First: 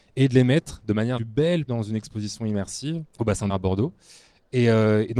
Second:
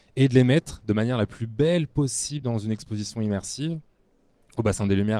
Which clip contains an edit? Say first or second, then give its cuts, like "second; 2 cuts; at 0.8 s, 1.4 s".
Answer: first; 4 cuts; at 1.2 s, 1.7 s, 3.1 s, 3.5 s